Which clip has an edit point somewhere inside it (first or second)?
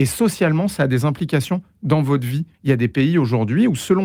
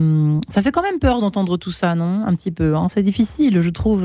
first